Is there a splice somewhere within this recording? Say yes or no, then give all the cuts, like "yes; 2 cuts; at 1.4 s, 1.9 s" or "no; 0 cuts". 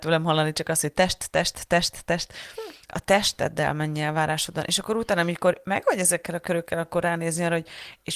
no; 0 cuts